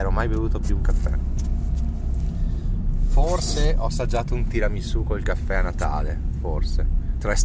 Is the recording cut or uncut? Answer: uncut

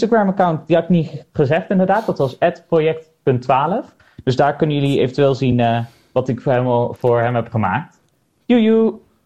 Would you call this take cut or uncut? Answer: uncut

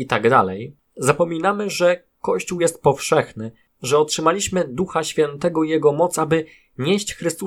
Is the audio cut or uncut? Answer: uncut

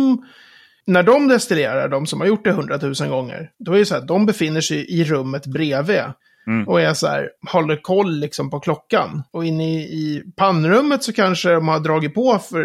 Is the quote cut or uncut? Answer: uncut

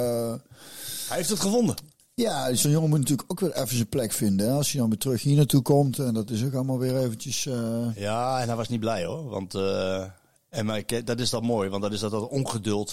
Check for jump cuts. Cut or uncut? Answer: uncut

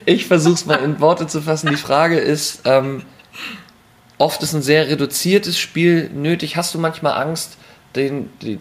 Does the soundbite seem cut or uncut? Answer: uncut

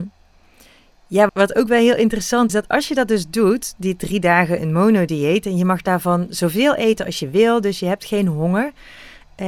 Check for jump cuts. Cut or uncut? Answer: cut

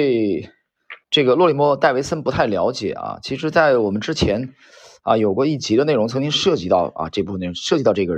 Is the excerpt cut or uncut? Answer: cut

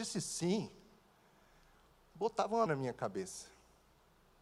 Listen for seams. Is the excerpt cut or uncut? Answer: cut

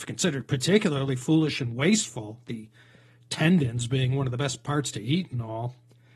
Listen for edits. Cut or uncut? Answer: uncut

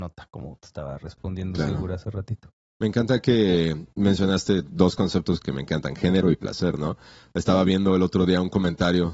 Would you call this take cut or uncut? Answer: uncut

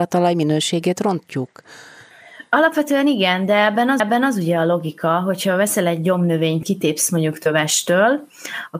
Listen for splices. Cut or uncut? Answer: cut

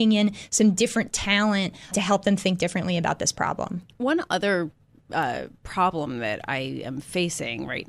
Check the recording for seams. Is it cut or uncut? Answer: cut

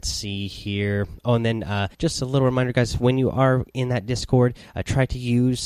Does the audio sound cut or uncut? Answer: cut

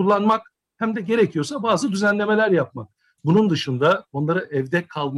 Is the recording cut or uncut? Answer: uncut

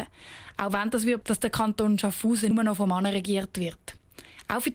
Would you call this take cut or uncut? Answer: cut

